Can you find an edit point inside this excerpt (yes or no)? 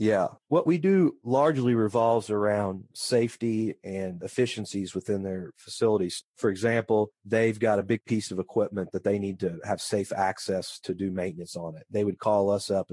no